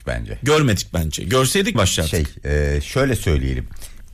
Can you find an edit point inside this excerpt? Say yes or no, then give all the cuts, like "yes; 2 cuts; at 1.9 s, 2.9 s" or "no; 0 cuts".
yes; 1 cut; at 1.7 s